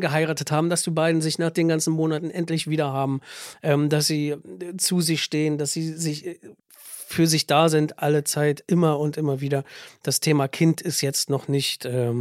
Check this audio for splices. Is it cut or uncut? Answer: cut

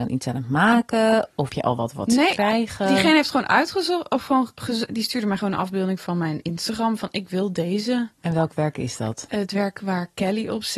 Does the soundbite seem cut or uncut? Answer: cut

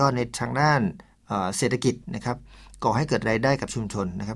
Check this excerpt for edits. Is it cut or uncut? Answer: cut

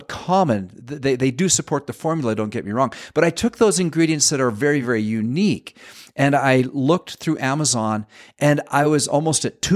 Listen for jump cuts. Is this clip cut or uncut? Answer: uncut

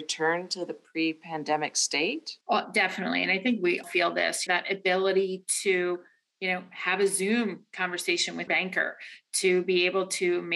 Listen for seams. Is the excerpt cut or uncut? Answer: cut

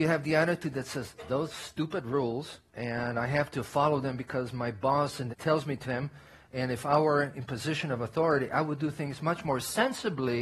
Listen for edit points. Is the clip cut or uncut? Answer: cut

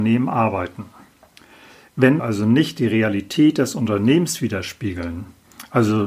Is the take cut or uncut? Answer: cut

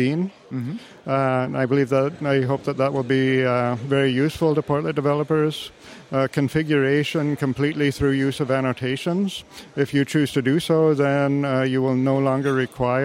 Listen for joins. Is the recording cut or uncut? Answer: uncut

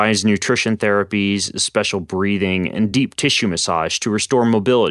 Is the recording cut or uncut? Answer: uncut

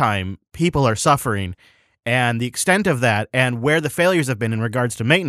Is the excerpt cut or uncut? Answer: uncut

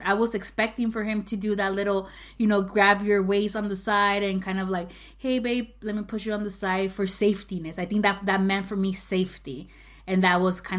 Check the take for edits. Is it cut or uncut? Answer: uncut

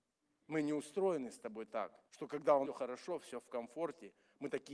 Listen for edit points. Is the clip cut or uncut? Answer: cut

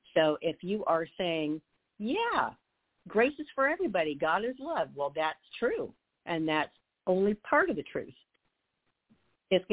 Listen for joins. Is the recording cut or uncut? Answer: uncut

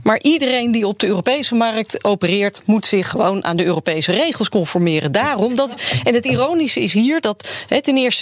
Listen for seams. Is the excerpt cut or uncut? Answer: uncut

